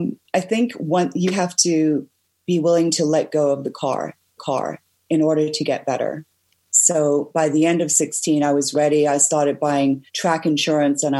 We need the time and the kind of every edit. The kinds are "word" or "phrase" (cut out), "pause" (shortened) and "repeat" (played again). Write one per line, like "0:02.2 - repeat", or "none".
0:01.3 - word
0:04.4 - repeat
0:10.1 - pause